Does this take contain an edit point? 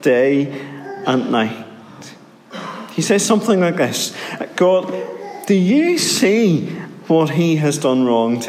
no; 0 cuts

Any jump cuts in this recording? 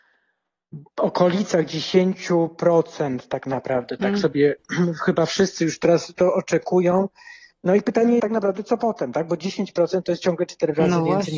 yes; 1 cut; at 8.2 s

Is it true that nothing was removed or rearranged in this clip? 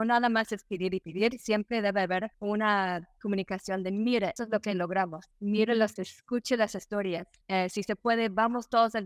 no; 6 cuts; at 1.0 s, 2.3 s, 4.4 s, 5.3 s, 6.0 s, 7.4 s

